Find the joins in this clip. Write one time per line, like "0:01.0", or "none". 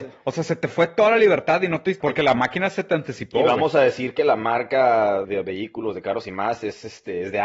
0:02.0
0:05.2